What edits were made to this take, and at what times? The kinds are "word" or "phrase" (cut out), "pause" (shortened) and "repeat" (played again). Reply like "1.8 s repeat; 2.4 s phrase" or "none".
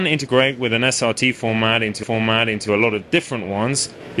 2.0 s repeat